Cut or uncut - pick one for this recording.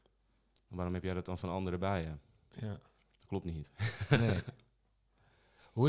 uncut